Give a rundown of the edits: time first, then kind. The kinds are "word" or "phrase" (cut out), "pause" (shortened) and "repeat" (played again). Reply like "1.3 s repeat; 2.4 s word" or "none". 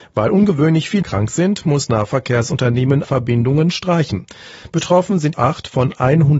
1.0 s word; 1.9 s word; 3.0 s word; 5.3 s word